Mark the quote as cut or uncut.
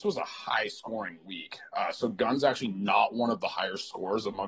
uncut